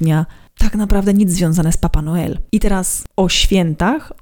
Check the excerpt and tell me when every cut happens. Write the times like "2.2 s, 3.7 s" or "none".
none